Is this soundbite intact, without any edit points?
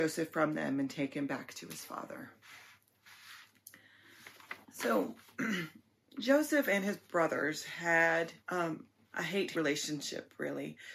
no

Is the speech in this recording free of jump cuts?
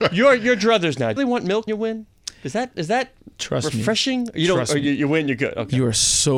no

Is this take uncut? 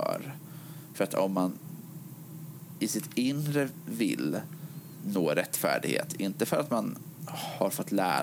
yes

